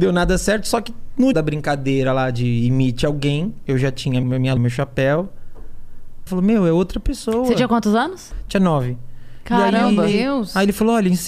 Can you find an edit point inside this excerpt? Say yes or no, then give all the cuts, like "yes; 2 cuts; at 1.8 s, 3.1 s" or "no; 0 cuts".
yes; 4 cuts; at 1.3 s, 4.2 s, 4.6 s, 6.3 s